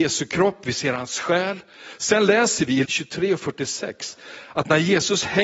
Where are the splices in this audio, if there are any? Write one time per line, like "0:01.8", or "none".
0:02.8